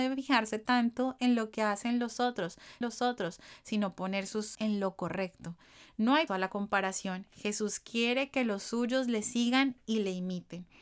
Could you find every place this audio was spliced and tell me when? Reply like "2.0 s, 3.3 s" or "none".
2.8 s, 4.5 s, 6.3 s

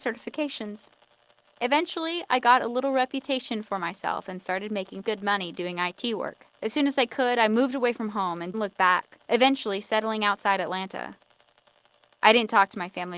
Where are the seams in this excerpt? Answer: 5.0 s, 6.6 s, 8.5 s, 9.2 s

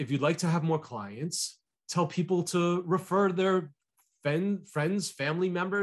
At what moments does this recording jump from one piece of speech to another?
none

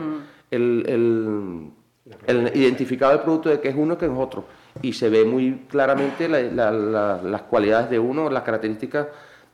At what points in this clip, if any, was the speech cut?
none

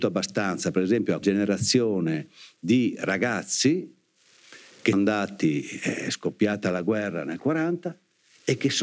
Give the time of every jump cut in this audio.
1.2 s, 4.9 s

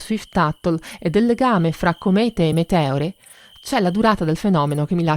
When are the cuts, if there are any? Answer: none

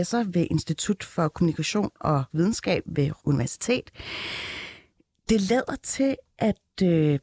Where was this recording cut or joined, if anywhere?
2.3 s, 3.2 s

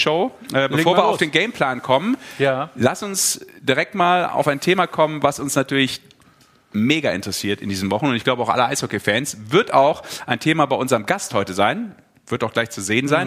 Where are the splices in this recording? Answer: none

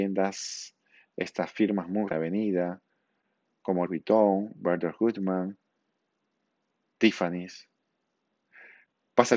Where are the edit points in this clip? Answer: 2.1 s, 3.8 s

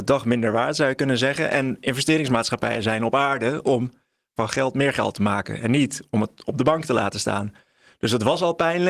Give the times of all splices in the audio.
none

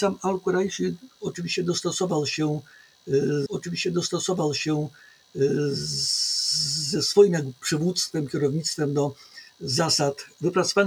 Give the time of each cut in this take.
3.5 s

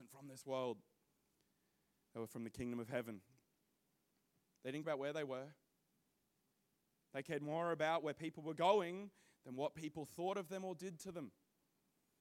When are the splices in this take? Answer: 4.8 s

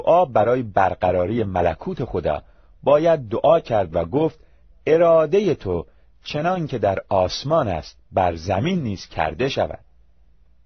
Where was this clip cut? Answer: none

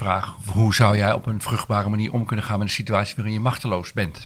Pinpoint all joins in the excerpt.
none

